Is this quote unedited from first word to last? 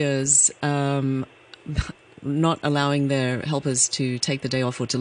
yes; 0 cuts

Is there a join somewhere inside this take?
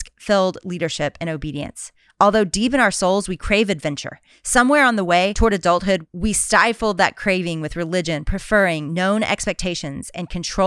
no; 0 cuts

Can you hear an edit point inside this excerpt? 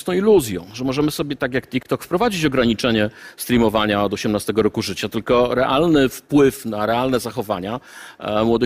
no; 0 cuts

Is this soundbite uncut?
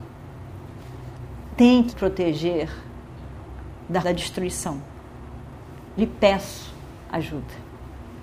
no; 4 cuts; at 1.5 s, 1.9 s, 4.0 s, 6.0 s

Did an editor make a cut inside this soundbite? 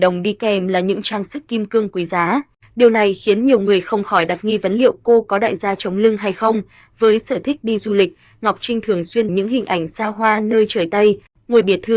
yes; 1 cut; at 9.3 s

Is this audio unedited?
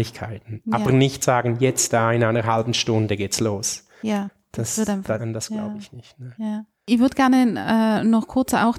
no; 1 cut; at 5.2 s

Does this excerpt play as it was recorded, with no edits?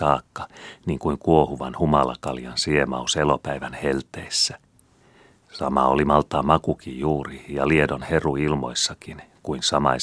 yes; 0 cuts

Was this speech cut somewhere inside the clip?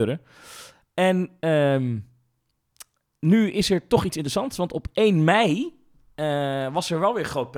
no; 0 cuts

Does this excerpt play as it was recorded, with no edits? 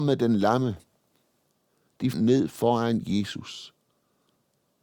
no; 1 cut; at 2.1 s

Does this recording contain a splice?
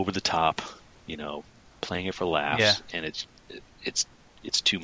no; 0 cuts

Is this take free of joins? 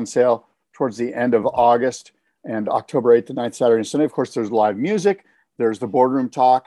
yes; 0 cuts

